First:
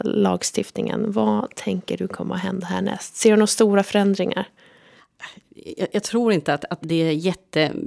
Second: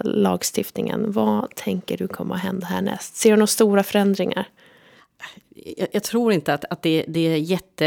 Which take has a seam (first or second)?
first